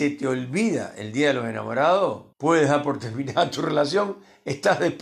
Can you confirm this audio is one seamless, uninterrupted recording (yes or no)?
no